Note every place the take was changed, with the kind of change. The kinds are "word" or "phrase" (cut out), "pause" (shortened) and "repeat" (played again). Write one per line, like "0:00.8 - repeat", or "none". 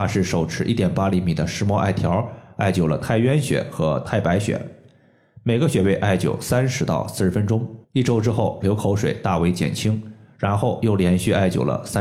0:07.8 - pause